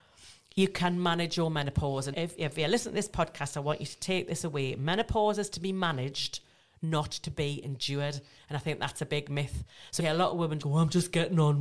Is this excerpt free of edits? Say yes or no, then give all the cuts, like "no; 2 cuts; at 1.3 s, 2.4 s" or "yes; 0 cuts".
no; 3 cuts; at 2.1 s, 10.0 s, 10.6 s